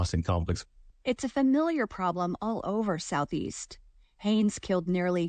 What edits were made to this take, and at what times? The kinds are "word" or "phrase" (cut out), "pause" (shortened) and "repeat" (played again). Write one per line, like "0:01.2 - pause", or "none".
none